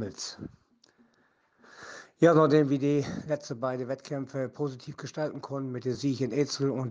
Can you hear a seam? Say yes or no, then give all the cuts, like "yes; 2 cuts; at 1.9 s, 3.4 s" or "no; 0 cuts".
no; 0 cuts